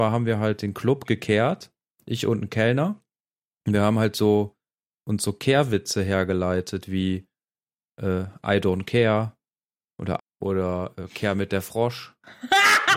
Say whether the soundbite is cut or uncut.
cut